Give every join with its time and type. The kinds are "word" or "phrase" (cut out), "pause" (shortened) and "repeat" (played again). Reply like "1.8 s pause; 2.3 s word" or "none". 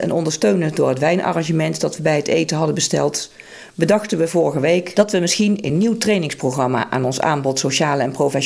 none